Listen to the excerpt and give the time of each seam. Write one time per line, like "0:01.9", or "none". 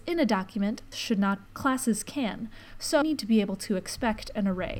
0:00.9
0:01.5
0:03.0